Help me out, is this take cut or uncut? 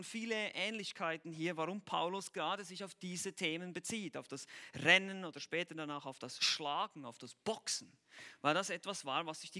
uncut